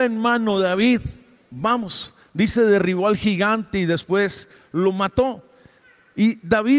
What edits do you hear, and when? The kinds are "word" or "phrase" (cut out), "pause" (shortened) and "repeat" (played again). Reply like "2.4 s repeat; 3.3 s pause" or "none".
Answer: none